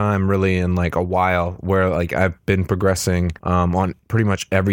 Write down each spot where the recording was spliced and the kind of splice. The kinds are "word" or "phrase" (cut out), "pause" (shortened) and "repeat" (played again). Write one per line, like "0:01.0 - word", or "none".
0:03.4 - pause